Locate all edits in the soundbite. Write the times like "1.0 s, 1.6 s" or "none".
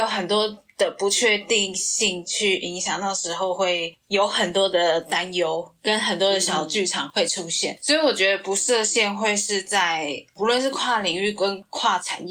4.0 s